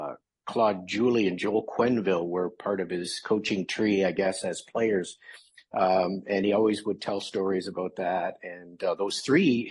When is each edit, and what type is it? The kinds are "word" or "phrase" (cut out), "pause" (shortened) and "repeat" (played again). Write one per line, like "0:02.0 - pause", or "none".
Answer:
none